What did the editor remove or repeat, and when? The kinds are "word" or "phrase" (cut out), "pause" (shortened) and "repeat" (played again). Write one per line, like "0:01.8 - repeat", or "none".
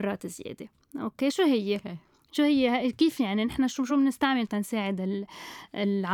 none

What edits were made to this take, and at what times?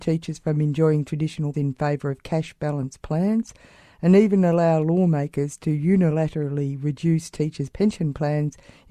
0:01.5 - word

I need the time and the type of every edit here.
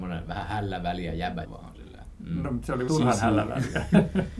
0:01.4 - word
0:02.9 - word

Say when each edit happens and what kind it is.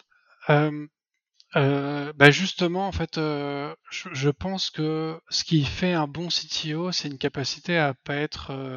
0:05.2 - pause

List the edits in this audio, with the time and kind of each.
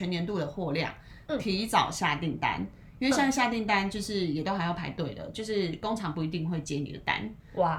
none

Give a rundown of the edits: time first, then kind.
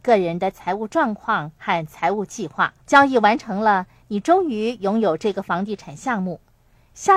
0:02.8 - pause

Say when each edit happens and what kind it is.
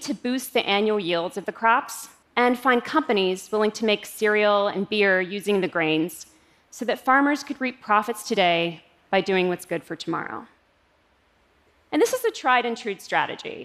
0:02.2 - pause

